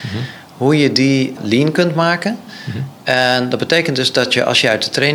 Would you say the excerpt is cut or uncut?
uncut